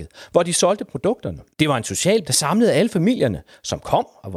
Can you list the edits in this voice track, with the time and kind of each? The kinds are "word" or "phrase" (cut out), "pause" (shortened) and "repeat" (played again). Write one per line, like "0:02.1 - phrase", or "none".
0:01.5 - pause
0:02.2 - word